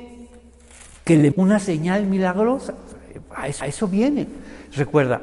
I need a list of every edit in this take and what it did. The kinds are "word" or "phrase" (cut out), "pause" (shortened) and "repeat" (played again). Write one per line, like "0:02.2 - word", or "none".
0:01.3 - word
0:03.6 - repeat